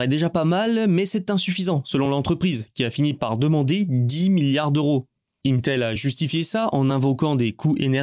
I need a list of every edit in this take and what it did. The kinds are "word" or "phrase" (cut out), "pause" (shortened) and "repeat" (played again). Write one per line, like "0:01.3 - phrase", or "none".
none

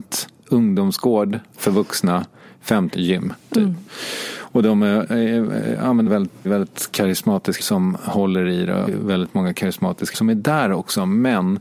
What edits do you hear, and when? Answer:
0:02.9 - word
0:06.1 - word
0:06.4 - word
0:07.6 - word
0:08.9 - word
0:10.1 - word

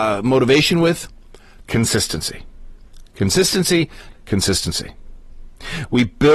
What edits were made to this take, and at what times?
0:04.1 - word

